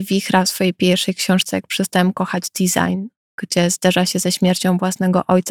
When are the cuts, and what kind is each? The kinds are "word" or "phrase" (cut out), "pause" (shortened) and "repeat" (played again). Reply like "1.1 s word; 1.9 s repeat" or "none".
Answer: none